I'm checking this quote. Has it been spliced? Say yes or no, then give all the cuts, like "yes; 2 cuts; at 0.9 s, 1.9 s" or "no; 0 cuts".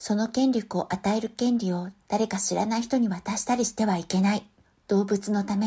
yes; 1 cut; at 4.7 s